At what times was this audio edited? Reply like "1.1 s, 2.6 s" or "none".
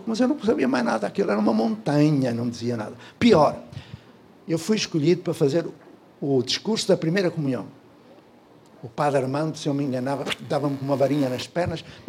none